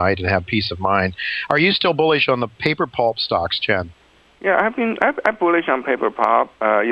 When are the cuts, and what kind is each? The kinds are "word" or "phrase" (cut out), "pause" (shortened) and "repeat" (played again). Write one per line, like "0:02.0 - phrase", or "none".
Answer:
none